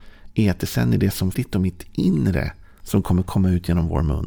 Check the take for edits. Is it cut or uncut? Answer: cut